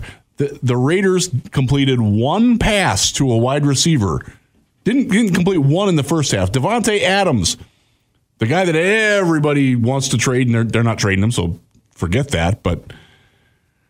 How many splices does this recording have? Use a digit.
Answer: 0